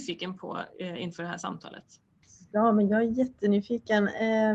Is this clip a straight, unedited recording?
yes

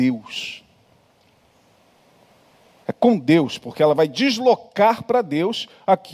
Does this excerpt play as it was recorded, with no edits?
yes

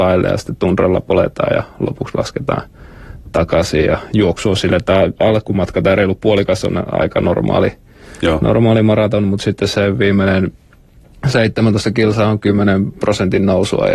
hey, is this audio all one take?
yes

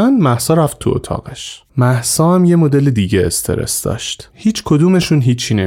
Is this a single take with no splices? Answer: no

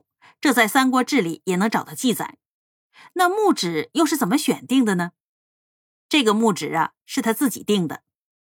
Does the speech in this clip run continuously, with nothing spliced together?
yes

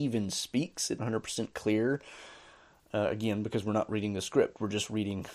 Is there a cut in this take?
yes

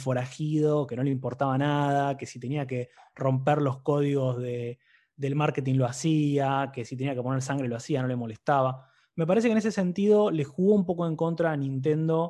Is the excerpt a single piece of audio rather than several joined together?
yes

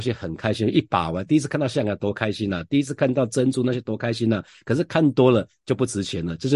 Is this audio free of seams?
yes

